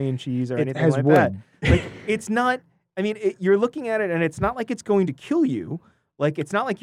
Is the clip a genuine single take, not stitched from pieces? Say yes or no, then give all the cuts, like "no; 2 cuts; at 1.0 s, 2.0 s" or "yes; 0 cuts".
yes; 0 cuts